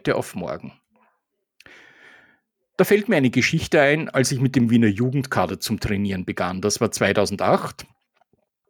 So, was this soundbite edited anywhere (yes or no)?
no